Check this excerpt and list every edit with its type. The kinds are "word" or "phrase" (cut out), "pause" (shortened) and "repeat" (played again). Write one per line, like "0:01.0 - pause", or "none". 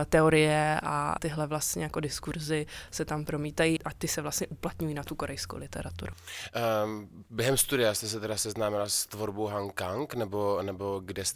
0:01.2 - word
0:03.8 - word